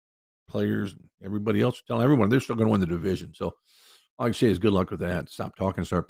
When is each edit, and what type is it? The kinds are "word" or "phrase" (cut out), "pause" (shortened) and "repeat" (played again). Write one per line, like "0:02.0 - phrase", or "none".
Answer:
none